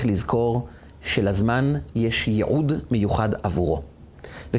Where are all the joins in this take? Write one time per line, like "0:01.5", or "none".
none